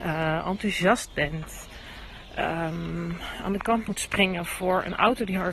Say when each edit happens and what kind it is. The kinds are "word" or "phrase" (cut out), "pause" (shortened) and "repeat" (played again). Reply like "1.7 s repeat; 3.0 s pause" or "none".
none